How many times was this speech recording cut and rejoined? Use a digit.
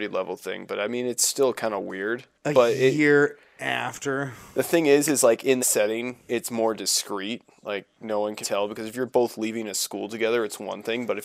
3